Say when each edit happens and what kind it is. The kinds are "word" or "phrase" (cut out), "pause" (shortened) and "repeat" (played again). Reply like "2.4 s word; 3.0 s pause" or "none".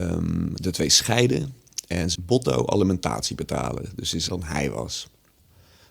2.1 s word; 4.3 s word